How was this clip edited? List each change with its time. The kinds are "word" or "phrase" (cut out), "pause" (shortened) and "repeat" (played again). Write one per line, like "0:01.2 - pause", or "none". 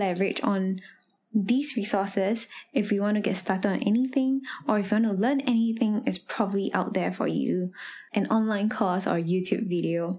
none